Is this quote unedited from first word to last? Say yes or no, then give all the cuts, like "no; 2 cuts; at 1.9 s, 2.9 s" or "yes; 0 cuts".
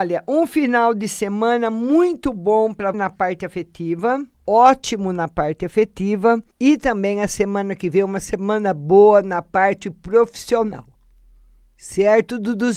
no; 3 cuts; at 2.9 s, 4.3 s, 6.5 s